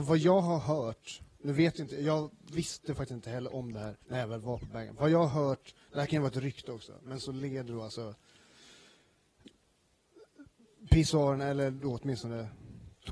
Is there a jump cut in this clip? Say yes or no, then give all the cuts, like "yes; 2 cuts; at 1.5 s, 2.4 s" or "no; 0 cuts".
yes; 2 cuts; at 1.3 s, 4.0 s